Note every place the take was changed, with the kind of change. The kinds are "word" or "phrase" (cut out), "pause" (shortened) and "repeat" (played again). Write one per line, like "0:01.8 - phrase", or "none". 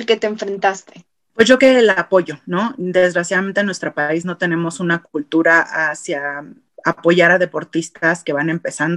0:01.6 - word